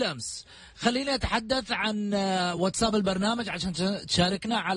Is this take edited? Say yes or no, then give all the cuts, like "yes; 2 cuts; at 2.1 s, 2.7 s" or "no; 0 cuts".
no; 0 cuts